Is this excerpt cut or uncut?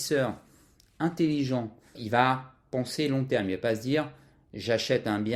cut